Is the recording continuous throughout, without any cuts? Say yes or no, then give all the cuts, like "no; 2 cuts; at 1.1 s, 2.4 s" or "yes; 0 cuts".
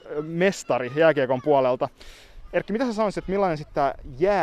yes; 0 cuts